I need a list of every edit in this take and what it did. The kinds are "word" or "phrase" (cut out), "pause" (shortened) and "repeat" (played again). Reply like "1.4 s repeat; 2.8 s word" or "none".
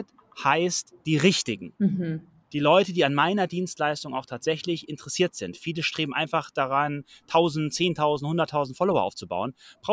1.8 s pause